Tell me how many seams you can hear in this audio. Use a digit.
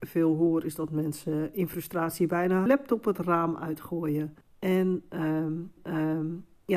3